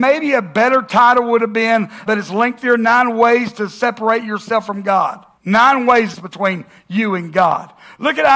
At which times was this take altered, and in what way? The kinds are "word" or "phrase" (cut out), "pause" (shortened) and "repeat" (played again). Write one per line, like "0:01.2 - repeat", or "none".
0:02.1 - word
0:05.3 - pause
0:06.1 - phrase